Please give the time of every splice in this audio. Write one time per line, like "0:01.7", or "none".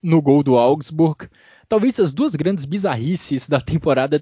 none